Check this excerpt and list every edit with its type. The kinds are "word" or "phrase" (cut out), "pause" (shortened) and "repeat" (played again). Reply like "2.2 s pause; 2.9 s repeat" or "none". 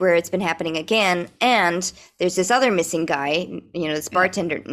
none